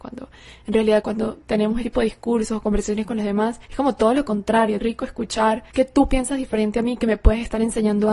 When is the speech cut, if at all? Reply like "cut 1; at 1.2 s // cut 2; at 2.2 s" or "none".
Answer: cut 1; at 1.0 s // cut 2; at 1.8 s // cut 3; at 3.6 s // cut 4; at 4.8 s // cut 5; at 5.7 s

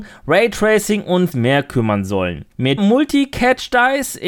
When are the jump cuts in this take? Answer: cut 1; at 1.3 s // cut 2; at 2.8 s

